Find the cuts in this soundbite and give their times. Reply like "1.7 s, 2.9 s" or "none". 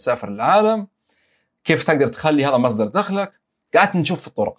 none